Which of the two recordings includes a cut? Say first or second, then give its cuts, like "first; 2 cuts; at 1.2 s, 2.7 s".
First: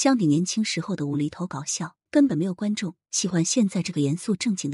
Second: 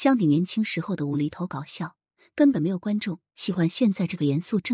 first; 1 cut; at 2.1 s